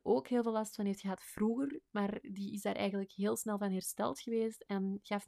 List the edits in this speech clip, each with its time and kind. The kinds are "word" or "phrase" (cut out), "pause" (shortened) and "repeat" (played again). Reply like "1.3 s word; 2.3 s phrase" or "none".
none